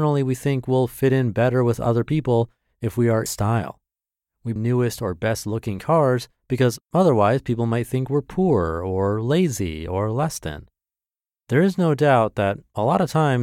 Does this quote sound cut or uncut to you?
cut